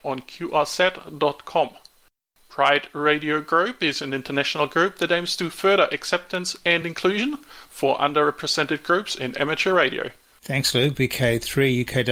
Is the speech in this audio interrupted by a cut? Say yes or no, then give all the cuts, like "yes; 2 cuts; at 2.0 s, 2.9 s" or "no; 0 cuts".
no; 0 cuts